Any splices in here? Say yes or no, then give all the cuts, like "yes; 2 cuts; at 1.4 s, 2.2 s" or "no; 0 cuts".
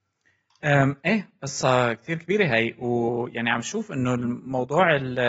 no; 0 cuts